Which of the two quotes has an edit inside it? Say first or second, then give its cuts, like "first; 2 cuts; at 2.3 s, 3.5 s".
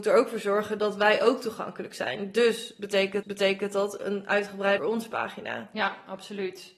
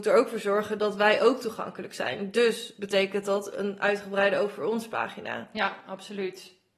first; 2 cuts; at 3.2 s, 4.8 s